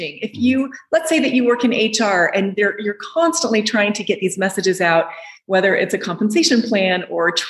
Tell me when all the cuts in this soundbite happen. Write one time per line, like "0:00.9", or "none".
none